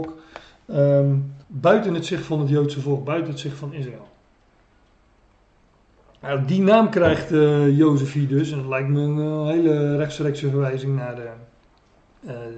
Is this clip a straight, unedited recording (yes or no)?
no